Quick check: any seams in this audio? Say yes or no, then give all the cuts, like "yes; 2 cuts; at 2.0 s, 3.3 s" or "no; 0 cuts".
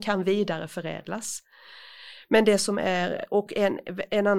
no; 0 cuts